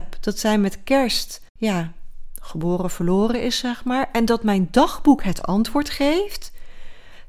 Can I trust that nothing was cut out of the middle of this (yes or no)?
no